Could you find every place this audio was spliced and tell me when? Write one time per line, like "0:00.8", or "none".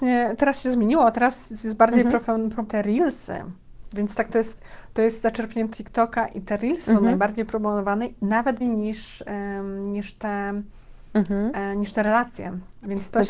0:02.6
0:04.3
0:05.7
0:08.6